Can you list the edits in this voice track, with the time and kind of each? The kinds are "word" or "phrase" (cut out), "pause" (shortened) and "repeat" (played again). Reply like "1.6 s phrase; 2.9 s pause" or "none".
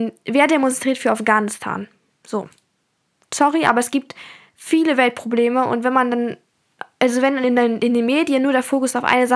2.1 s pause